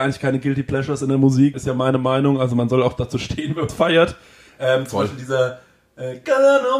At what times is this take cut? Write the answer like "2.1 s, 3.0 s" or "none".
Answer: 1.5 s, 3.7 s